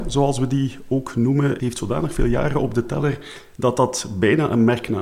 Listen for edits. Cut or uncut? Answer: cut